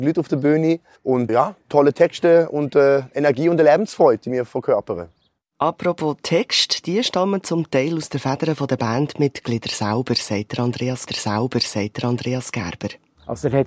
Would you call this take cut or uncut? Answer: cut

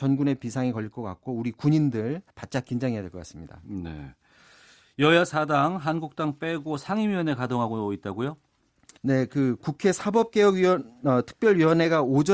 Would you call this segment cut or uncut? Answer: cut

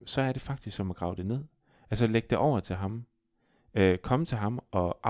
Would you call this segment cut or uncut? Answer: uncut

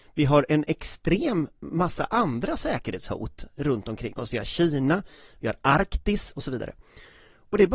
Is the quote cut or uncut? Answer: uncut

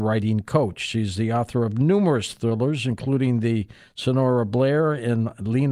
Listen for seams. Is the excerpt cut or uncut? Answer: uncut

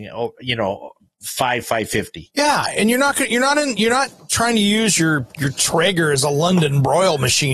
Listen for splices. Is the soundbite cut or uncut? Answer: uncut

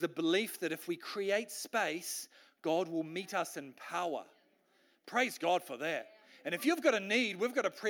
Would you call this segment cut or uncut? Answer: uncut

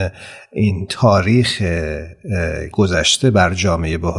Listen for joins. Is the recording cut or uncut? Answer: cut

